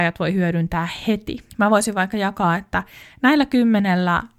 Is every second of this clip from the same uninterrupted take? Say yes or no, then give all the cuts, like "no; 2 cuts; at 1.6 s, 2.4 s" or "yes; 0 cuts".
yes; 0 cuts